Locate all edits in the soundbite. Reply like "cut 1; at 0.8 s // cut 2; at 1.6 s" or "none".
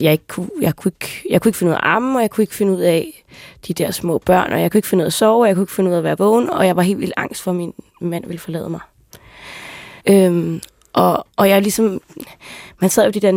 cut 1; at 7.9 s // cut 2; at 10.0 s // cut 3; at 11.3 s